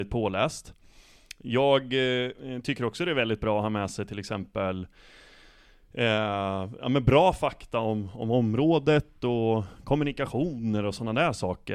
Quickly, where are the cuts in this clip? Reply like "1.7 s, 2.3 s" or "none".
none